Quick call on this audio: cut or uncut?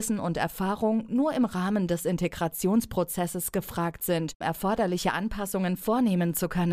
cut